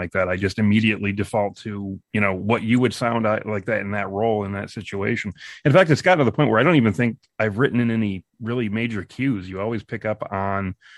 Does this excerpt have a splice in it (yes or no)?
yes